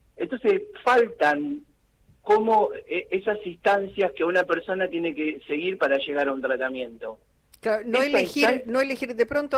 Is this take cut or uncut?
uncut